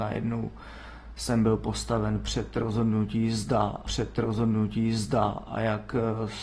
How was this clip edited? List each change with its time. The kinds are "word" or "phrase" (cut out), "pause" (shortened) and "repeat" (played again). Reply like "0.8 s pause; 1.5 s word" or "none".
3.8 s repeat

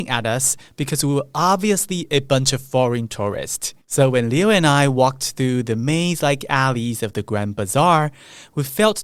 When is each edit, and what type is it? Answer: 3.8 s pause

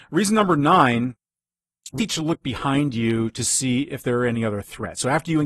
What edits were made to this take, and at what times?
2.0 s word

